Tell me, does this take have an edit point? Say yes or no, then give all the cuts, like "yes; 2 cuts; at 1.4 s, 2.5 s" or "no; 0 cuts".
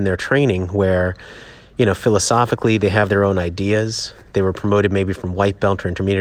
no; 0 cuts